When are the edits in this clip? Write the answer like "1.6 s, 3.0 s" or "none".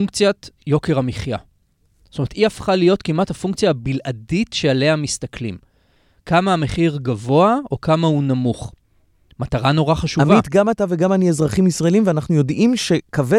none